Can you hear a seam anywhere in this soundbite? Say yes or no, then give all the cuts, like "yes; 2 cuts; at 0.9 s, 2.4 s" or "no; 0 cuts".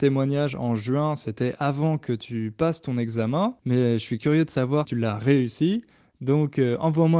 yes; 2 cuts; at 3.6 s, 4.8 s